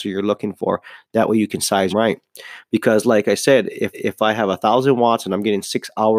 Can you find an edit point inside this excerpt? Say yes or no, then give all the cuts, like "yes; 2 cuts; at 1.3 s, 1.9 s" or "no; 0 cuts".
yes; 2 cuts; at 1.9 s, 3.9 s